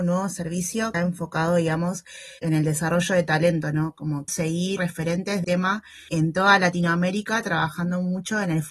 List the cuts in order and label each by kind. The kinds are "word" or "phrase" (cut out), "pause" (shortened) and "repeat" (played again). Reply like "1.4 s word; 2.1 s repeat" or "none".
0.9 s word; 2.4 s word; 4.3 s word; 4.8 s word; 5.4 s word; 6.1 s word